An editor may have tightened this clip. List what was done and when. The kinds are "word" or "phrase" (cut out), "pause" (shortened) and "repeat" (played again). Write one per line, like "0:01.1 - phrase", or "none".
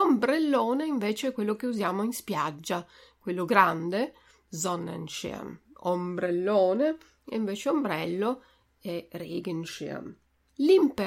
none